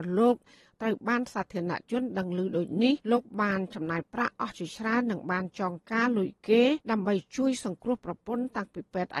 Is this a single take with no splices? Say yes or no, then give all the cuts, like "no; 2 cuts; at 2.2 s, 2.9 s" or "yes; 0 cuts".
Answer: no; 2 cuts; at 3.0 s, 6.8 s